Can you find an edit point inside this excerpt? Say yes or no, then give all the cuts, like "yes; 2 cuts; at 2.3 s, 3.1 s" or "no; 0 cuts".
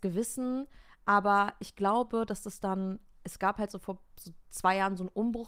yes; 1 cut; at 4.1 s